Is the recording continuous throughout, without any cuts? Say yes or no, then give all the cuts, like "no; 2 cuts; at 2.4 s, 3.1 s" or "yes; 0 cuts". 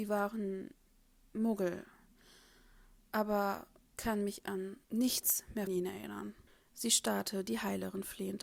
no; 4 cuts; at 3.9 s, 4.8 s, 5.7 s, 6.5 s